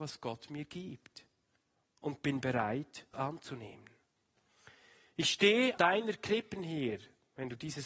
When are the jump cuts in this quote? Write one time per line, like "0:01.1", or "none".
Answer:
0:03.1
0:05.8